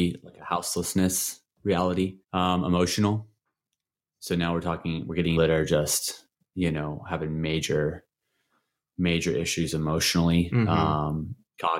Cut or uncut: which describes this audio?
cut